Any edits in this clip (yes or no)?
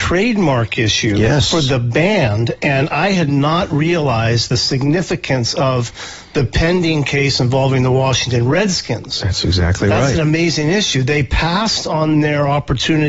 no